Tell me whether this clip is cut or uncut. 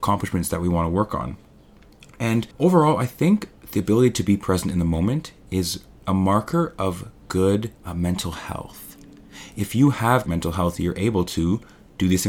cut